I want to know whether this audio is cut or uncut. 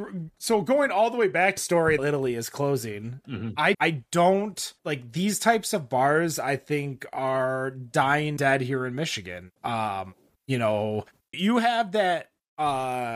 cut